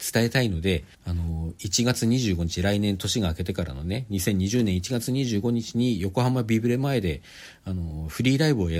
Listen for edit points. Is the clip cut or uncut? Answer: cut